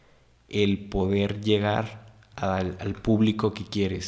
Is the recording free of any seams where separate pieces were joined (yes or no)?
yes